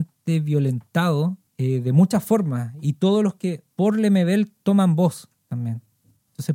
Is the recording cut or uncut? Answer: cut